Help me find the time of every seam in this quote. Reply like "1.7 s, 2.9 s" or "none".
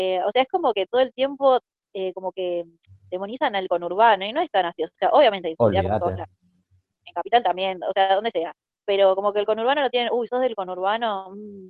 none